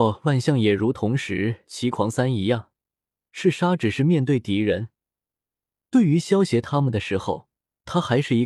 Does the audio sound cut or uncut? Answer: uncut